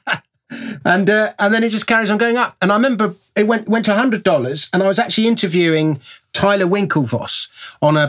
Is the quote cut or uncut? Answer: uncut